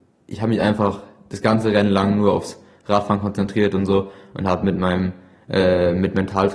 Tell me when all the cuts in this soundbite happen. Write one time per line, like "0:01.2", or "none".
none